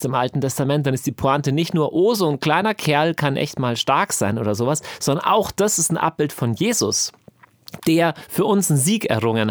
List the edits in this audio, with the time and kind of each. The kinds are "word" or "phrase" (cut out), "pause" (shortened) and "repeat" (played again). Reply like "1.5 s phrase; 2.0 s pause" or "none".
none